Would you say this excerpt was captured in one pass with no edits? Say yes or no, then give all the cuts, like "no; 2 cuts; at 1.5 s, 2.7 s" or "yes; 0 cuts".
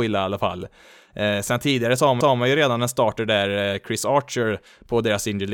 no; 1 cut; at 2.2 s